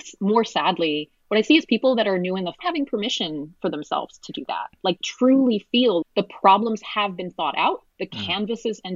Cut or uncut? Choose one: cut